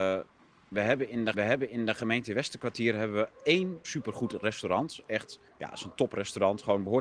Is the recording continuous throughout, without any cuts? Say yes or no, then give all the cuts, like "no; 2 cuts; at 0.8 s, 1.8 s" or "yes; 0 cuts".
no; 3 cuts; at 1.3 s, 3.8 s, 5.5 s